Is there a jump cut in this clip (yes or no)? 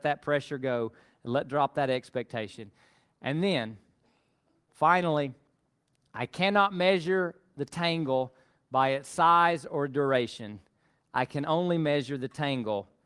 no